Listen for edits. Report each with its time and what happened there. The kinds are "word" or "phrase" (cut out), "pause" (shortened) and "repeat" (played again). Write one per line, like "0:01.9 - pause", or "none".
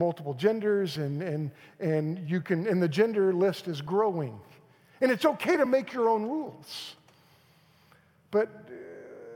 none